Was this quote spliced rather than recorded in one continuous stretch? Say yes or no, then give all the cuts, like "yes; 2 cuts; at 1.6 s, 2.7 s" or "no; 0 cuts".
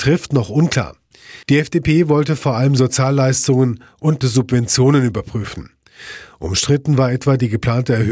yes; 2 cuts; at 1.4 s, 4.2 s